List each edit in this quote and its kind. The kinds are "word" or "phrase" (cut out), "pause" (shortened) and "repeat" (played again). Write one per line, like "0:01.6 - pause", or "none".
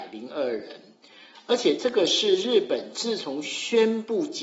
none